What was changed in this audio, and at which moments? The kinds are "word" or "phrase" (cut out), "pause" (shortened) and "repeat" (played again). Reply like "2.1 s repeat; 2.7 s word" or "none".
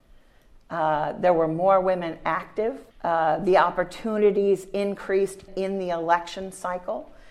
2.9 s pause; 5.5 s word